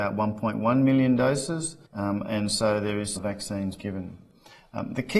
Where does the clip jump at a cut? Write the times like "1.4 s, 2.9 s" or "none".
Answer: 1.8 s, 3.2 s, 3.8 s